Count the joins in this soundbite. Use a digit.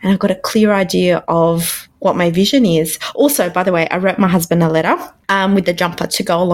1